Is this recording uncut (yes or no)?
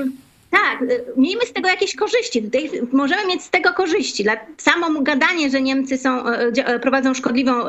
yes